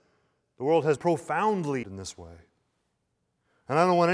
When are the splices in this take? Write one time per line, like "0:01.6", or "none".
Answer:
0:01.0
0:01.8